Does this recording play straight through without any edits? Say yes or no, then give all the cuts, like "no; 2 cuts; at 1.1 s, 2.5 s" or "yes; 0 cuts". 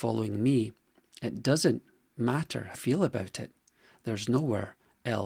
no; 1 cut; at 2.7 s